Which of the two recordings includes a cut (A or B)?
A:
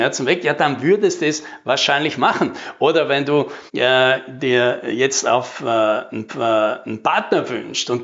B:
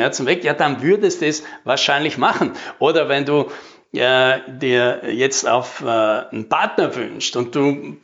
A